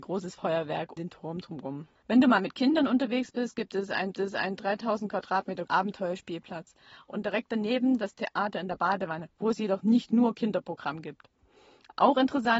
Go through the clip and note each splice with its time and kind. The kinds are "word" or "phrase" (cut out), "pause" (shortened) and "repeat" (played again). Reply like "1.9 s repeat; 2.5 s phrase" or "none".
1.0 s word; 4.1 s repeat; 5.7 s word